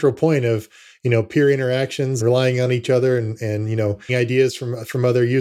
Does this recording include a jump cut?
yes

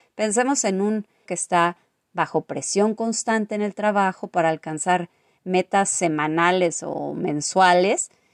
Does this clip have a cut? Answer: yes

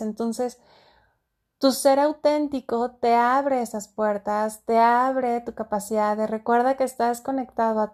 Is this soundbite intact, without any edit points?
yes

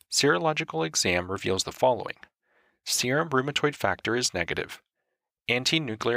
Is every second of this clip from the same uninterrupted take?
yes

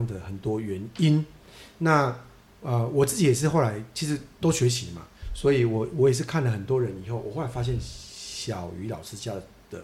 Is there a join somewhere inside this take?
no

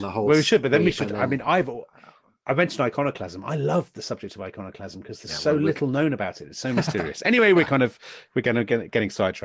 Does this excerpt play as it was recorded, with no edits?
yes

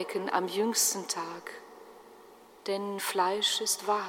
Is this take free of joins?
no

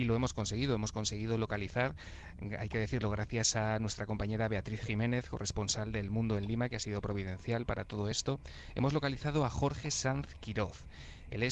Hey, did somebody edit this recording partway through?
no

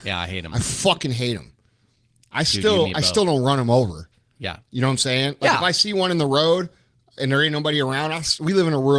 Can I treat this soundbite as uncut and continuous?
yes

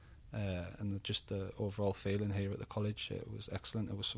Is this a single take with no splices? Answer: yes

